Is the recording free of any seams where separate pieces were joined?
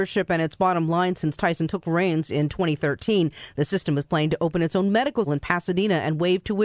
no; 1 cut; at 5.3 s

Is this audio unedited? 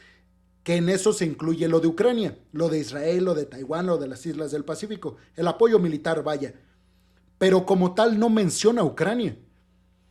yes; 0 cuts

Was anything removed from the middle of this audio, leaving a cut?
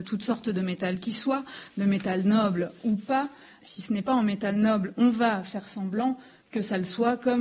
no; 0 cuts

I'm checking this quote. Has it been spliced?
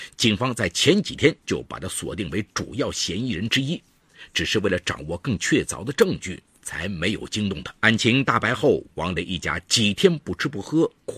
yes; 2 cuts; at 1.4 s, 7.8 s

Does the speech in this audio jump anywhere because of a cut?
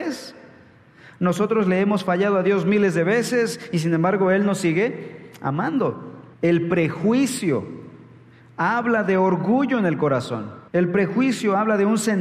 yes; 2 cuts; at 6.3 s, 10.7 s

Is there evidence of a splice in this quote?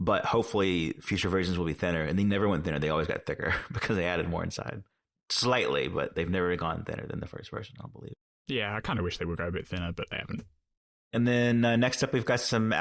no; 0 cuts

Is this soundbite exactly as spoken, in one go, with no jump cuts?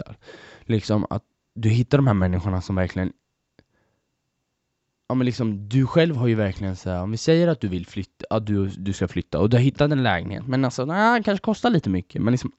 yes; 0 cuts

